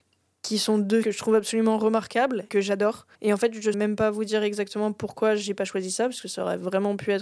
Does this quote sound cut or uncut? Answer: cut